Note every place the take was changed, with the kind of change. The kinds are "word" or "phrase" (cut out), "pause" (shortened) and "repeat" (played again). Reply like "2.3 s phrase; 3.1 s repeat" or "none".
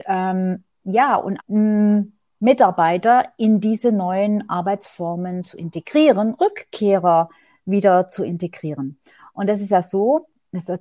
1.4 s phrase; 6.4 s phrase